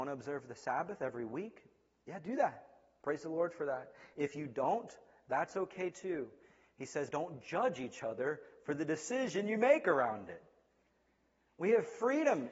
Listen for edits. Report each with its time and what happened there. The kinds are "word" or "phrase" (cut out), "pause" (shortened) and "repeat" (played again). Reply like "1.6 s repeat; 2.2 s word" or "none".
7.1 s word